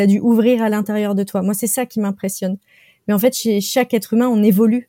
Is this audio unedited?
yes; 0 cuts

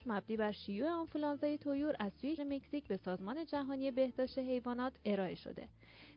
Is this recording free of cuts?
no; 1 cut; at 2.4 s

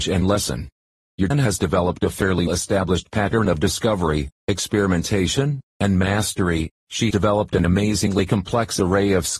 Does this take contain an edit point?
yes; 3 cuts; at 1.3 s, 2.5 s, 7.1 s

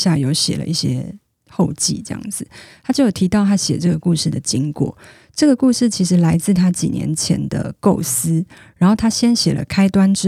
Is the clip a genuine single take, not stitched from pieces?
yes; 0 cuts

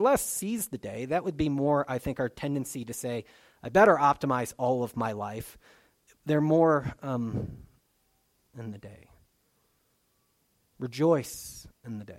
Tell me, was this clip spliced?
yes; 1 cut; at 8.4 s

